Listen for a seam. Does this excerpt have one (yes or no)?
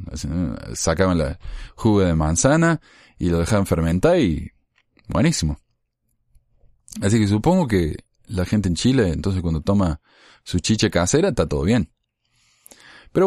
no